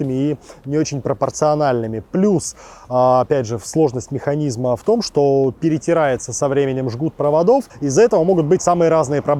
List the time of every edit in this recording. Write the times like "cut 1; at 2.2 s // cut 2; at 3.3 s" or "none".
cut 1; at 7.7 s